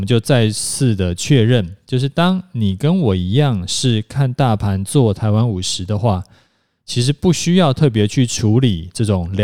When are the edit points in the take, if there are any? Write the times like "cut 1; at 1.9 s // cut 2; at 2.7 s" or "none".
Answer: none